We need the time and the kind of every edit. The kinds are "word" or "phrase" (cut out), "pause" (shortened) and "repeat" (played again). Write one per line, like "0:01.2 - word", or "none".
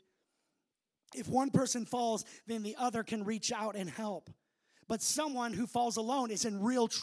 none